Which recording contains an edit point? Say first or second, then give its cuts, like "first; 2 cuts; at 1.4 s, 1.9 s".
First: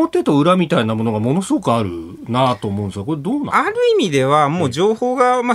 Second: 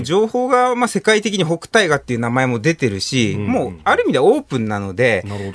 first; 1 cut; at 3.5 s